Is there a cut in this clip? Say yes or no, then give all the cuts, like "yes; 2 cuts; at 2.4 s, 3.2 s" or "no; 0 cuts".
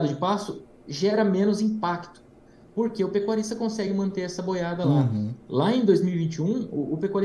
no; 0 cuts